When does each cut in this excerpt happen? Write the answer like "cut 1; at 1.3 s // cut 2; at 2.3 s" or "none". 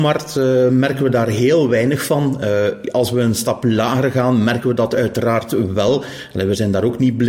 none